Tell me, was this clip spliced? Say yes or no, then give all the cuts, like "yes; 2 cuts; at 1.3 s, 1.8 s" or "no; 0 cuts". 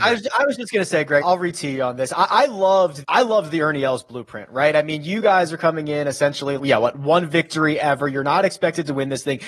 yes; 3 cuts; at 1.2 s, 3.0 s, 6.6 s